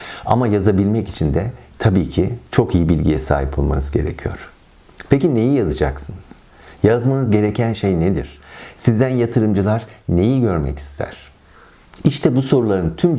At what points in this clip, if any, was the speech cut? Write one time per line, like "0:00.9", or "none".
none